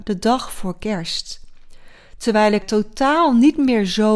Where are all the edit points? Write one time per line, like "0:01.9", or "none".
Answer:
0:02.6